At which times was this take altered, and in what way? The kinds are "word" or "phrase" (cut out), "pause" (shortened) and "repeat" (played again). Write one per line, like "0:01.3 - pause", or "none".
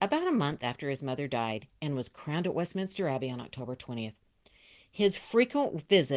none